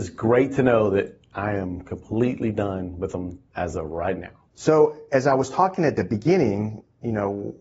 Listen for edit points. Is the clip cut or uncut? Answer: cut